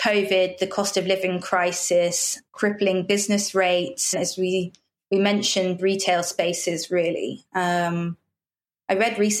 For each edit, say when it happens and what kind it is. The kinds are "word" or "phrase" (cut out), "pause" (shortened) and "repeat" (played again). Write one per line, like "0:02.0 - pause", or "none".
0:02.5 - word
0:04.1 - word
0:05.8 - word